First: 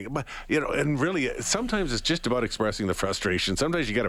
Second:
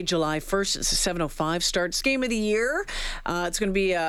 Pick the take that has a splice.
second; 1 cut; at 2.0 s

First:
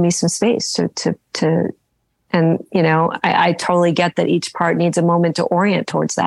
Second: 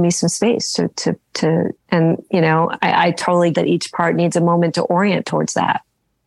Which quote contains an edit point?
second; 2 cuts; at 1.7 s, 3.5 s

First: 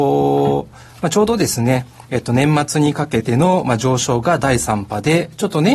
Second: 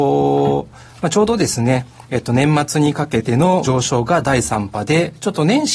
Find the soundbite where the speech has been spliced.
second; 1 cut; at 3.6 s

